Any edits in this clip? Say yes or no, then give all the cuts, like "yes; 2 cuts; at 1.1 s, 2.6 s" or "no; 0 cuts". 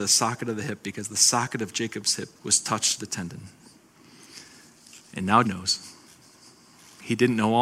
yes; 3 cuts; at 2.4 s, 3.0 s, 5.4 s